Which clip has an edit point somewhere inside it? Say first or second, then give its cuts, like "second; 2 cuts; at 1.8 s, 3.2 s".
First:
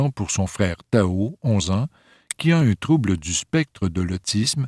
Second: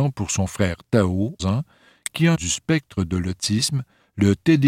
second; 2 cuts; at 1.4 s, 2.3 s